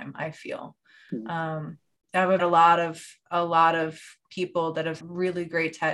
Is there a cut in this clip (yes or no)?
yes